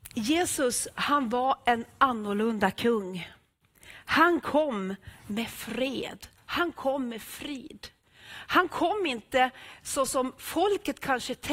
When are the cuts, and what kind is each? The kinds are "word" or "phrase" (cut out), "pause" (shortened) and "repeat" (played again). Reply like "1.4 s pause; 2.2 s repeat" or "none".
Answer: none